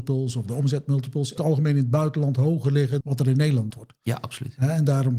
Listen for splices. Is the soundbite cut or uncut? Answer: cut